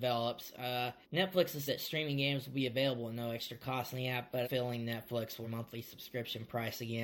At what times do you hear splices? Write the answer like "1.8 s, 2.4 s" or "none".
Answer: 1.0 s, 1.7 s, 4.4 s, 5.4 s